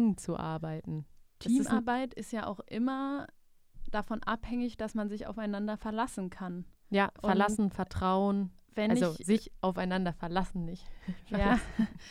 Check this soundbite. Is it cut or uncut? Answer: uncut